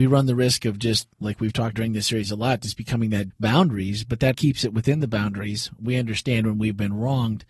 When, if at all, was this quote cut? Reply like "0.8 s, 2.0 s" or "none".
1.1 s, 1.7 s, 3.3 s, 4.3 s